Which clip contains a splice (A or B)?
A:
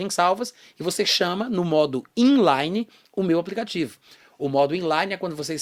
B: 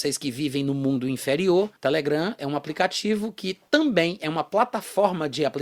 B